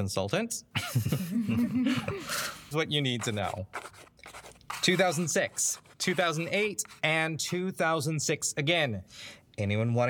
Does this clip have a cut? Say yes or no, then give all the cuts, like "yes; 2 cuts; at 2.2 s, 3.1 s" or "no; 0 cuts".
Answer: yes; 1 cut; at 2.7 s